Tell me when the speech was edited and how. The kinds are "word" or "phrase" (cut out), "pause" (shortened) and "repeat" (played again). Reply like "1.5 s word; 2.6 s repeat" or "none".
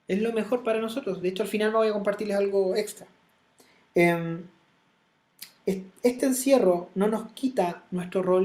none